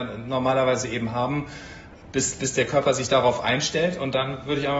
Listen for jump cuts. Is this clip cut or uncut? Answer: uncut